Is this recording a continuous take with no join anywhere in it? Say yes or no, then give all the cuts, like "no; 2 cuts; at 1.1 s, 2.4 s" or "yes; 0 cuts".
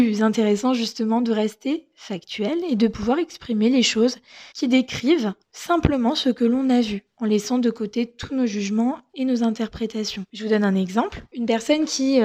no; 4 cuts; at 4.5 s, 5.4 s, 7.1 s, 10.3 s